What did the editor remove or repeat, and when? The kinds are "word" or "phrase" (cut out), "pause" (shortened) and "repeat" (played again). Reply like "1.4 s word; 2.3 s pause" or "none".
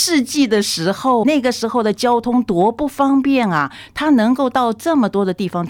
1.2 s word